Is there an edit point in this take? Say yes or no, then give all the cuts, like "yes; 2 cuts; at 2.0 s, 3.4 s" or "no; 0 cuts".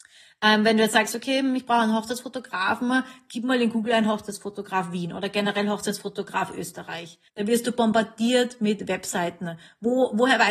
yes; 1 cut; at 7.3 s